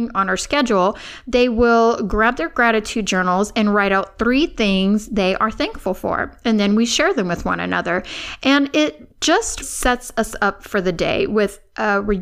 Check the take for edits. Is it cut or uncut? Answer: cut